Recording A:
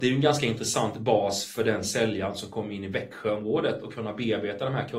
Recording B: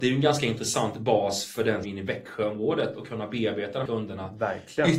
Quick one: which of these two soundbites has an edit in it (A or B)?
B